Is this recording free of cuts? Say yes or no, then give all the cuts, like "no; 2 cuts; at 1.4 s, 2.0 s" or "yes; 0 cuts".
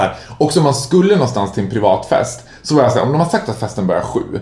yes; 0 cuts